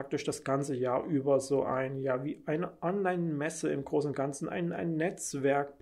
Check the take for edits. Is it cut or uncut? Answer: uncut